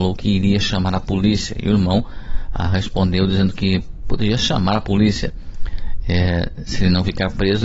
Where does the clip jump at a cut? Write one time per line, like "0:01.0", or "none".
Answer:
none